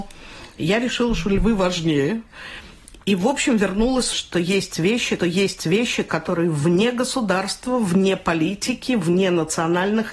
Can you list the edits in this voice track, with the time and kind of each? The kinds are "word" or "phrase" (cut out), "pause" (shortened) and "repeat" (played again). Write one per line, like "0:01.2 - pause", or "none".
0:04.1 - word
0:05.2 - repeat